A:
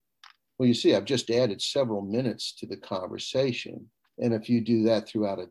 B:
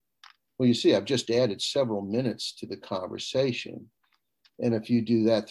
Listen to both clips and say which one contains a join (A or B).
A